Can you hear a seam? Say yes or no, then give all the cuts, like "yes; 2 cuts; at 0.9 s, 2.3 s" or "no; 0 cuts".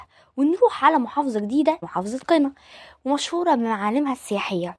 yes; 1 cut; at 1.8 s